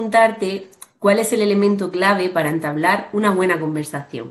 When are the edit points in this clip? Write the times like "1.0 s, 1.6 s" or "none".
none